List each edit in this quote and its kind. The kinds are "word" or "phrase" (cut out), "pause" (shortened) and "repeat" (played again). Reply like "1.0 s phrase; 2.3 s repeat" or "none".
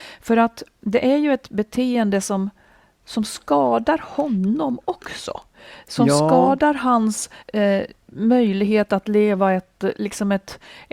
7.4 s pause